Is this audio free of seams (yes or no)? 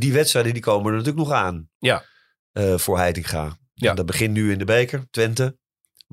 yes